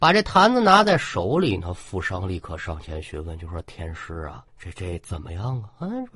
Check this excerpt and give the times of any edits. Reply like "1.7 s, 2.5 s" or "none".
4.5 s